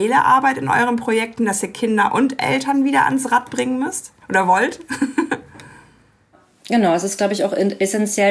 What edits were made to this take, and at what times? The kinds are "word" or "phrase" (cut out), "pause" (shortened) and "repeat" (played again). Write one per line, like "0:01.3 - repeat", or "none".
0:04.2 - pause